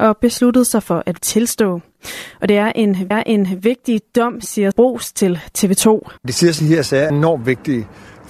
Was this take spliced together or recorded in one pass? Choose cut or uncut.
cut